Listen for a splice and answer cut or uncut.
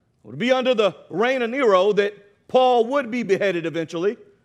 uncut